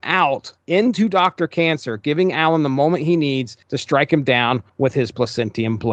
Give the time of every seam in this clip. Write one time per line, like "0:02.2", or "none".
none